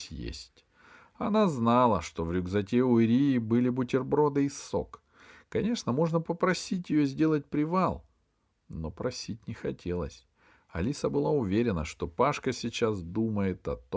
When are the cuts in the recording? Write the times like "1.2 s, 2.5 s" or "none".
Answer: none